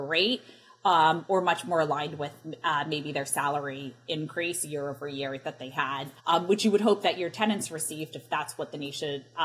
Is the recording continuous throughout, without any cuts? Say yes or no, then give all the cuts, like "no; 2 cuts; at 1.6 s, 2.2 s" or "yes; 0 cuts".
no; 1 cut; at 6.2 s